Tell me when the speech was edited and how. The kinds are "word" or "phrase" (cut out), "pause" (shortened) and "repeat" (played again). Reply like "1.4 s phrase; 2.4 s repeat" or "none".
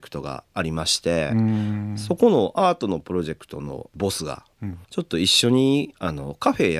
4.8 s pause